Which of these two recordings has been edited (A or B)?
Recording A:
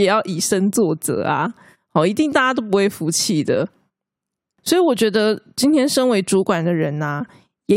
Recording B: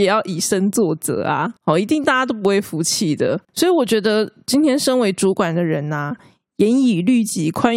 B